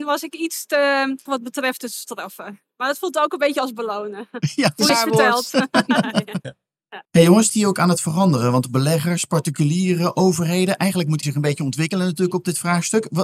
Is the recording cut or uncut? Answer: cut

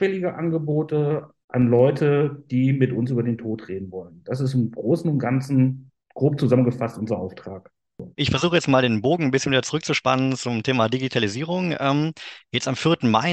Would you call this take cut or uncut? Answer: cut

